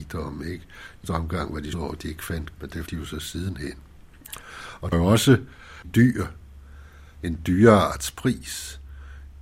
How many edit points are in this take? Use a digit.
6